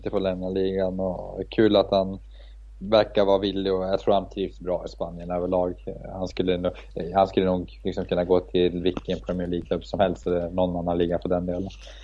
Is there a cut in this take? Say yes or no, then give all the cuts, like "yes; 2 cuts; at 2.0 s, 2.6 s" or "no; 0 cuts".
no; 0 cuts